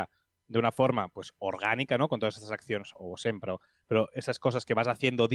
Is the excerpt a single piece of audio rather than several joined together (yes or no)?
yes